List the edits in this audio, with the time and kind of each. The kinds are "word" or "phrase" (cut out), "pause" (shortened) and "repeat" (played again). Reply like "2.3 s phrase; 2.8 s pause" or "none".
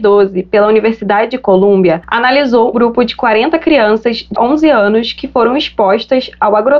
2.7 s word; 4.3 s word